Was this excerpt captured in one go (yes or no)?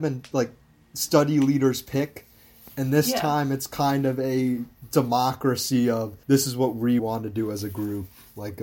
no